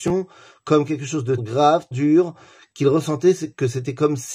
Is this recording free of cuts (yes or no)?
no